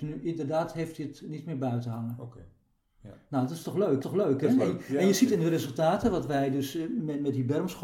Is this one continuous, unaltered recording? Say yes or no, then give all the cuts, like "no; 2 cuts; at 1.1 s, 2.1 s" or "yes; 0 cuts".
no; 1 cut; at 4.0 s